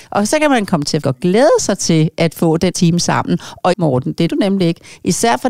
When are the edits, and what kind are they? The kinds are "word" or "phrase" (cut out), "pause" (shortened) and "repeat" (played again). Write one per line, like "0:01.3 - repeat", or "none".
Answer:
0:01.0 - word
0:02.7 - word
0:03.7 - word
0:04.3 - word